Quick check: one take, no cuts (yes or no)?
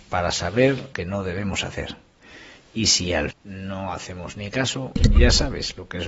no